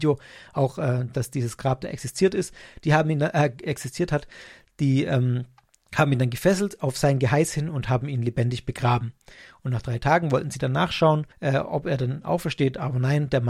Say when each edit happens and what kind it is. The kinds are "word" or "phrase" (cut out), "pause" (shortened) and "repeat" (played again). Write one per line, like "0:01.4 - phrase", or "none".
0:11.3 - pause